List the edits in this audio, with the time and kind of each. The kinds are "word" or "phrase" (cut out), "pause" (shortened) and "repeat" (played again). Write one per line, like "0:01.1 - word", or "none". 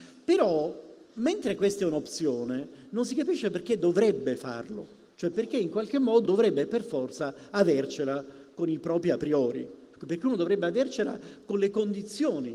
0:01.0 - pause
0:05.1 - pause
0:06.2 - word